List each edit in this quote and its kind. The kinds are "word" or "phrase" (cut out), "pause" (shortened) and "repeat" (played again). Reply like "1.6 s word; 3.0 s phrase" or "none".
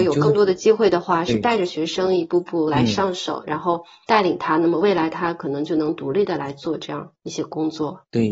none

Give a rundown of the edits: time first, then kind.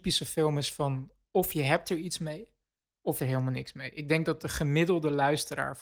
1.2 s pause; 3.2 s phrase

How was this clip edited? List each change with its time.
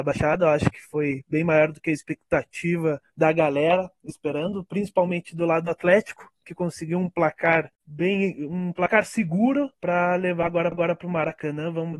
3.1 s pause; 7.7 s pause; 9.7 s pause; 10.7 s repeat

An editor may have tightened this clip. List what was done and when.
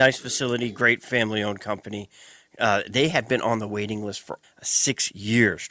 4.4 s word

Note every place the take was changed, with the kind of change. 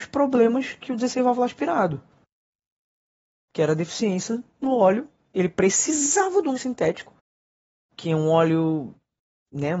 6.6 s word

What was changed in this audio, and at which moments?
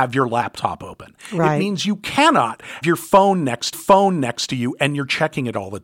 2.8 s word; 3.7 s repeat

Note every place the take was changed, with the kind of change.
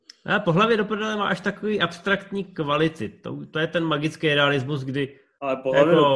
none

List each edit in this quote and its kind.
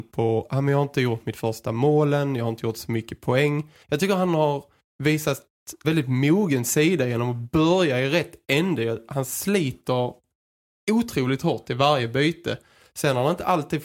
3.8 s pause; 5.8 s phrase

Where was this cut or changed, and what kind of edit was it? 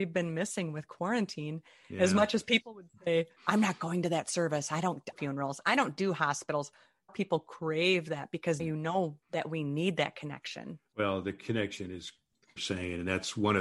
3.4 s pause; 5.1 s phrase; 7.1 s word; 8.6 s word; 9.2 s pause; 12.6 s phrase

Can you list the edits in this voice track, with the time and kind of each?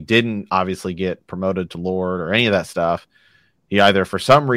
none

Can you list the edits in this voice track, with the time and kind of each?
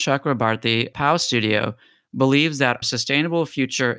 0.9 s word; 2.8 s word

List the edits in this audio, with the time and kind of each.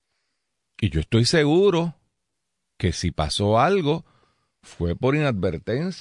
none

